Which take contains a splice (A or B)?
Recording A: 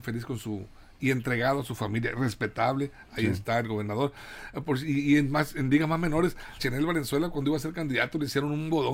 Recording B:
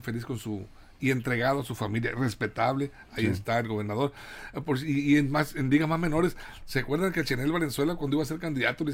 A